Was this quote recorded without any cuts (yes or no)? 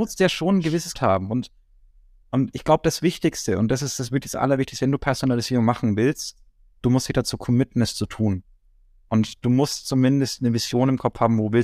no